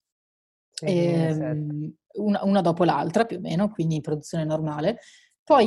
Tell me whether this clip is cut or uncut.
uncut